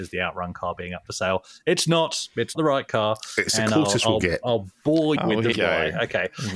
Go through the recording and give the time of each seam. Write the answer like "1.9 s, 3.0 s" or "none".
2.5 s, 5.2 s, 5.5 s